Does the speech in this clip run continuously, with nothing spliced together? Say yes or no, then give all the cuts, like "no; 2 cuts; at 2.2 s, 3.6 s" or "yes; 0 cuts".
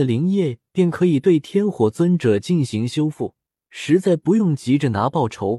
no; 1 cut; at 3.6 s